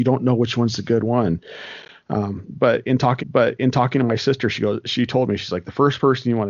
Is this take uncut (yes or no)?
no